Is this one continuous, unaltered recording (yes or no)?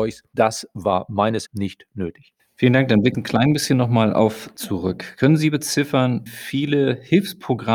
no